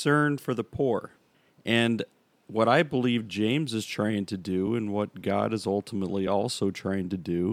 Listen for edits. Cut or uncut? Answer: uncut